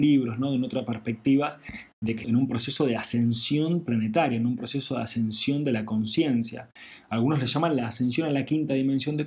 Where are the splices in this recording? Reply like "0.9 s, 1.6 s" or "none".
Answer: 2.2 s